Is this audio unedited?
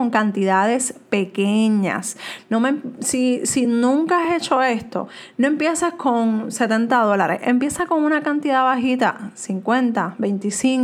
yes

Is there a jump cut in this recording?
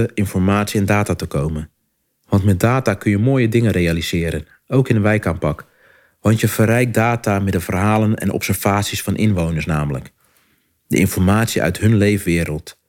no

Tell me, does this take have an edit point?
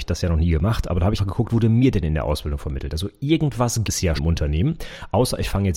yes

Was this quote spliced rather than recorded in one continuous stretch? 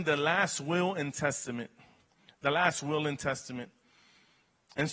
no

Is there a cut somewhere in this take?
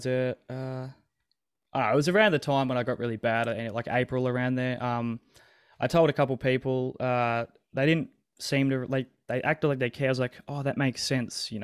no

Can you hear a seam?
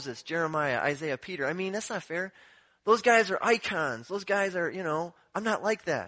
no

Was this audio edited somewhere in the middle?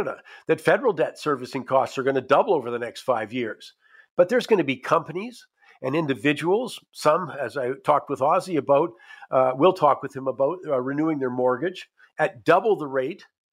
no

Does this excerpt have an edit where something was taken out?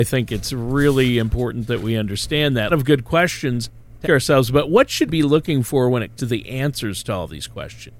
yes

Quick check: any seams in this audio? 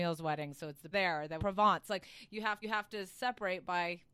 yes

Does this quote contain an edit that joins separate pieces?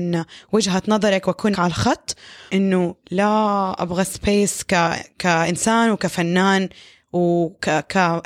yes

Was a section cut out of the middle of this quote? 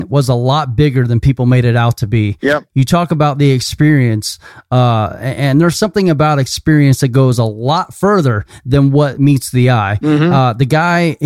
no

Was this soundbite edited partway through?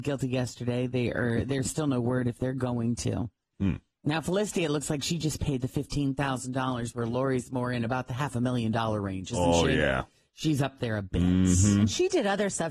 no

